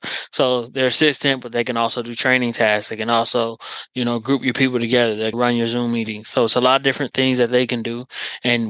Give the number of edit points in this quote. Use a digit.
1